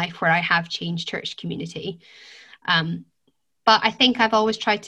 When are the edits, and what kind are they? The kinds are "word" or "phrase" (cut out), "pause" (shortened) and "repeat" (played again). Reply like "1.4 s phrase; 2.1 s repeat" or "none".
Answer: none